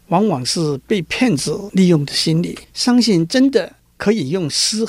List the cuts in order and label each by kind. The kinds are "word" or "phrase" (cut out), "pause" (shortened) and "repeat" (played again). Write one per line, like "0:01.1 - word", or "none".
0:02.6 - pause